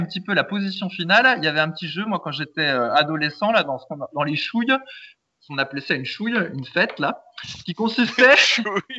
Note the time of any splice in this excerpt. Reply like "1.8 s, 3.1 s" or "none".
none

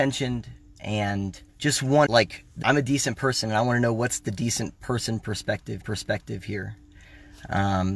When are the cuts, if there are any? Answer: 1.5 s, 2.1 s, 2.6 s, 5.8 s

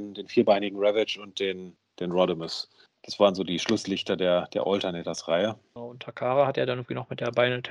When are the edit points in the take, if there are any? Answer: none

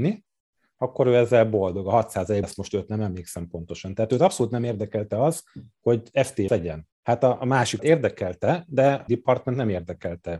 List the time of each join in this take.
2.4 s, 6.5 s, 6.9 s, 7.8 s, 9.1 s

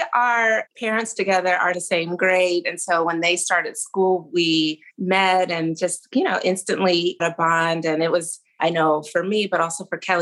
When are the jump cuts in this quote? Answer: 1.7 s, 4.9 s, 7.2 s

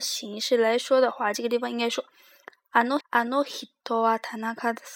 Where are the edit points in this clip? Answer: 3.0 s

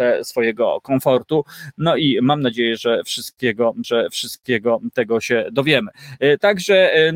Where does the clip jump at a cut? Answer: 3.8 s

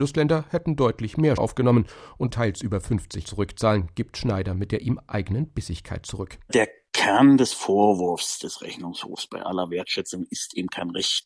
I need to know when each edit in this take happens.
1.4 s, 2.3 s, 3.2 s

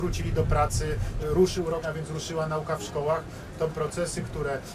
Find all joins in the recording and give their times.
1.2 s, 1.8 s, 3.7 s

